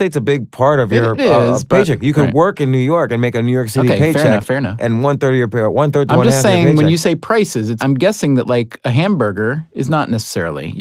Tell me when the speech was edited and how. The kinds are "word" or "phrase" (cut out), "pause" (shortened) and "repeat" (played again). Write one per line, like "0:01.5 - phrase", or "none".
0:01.2 - word
0:07.8 - word